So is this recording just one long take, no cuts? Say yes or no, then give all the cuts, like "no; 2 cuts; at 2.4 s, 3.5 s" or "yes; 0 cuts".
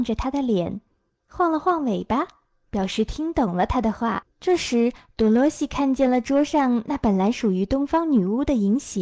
no; 1 cut; at 4.3 s